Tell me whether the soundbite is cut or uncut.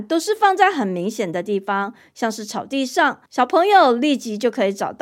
cut